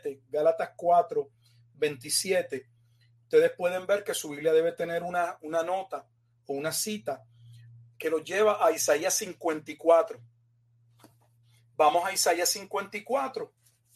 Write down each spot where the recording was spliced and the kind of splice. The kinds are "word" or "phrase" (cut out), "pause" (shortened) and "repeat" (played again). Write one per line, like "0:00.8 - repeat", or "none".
none